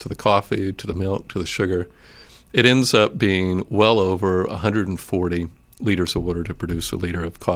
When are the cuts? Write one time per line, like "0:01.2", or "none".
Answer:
none

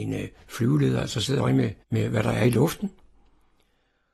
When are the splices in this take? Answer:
0:01.4
0:01.8

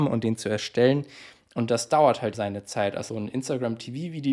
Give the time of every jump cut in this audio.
0:02.3
0:03.1

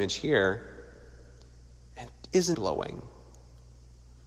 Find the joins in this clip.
0:02.5

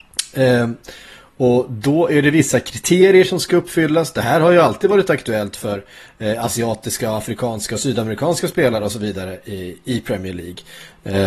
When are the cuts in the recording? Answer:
none

